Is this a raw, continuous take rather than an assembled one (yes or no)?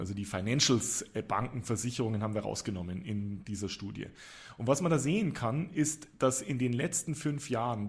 yes